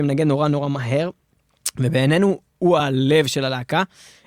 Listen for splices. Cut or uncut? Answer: uncut